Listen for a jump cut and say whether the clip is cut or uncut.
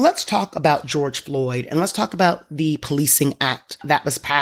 uncut